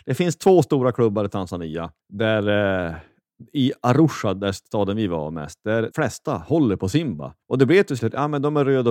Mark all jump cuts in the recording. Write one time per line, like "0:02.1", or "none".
0:02.0
0:05.9
0:07.4
0:08.0